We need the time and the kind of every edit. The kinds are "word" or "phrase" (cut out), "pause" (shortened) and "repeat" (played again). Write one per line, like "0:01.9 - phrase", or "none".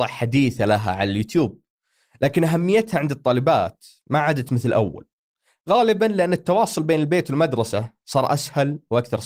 none